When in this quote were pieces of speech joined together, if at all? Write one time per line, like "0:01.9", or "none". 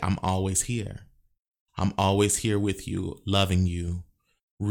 none